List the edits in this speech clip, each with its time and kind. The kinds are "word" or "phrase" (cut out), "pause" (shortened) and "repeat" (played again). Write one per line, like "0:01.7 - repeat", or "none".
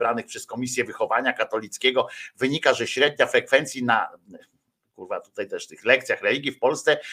none